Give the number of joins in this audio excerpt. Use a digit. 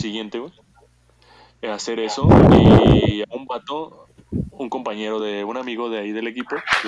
0